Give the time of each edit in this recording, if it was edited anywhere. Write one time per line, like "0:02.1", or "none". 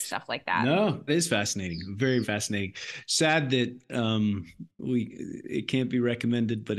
0:01.1
0:02.2
0:04.7